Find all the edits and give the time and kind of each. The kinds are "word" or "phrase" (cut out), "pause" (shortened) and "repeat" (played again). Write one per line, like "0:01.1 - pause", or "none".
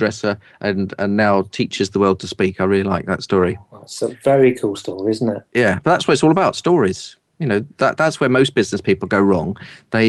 0:05.5 - pause